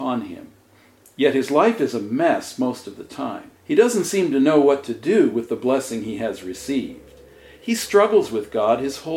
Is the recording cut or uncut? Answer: cut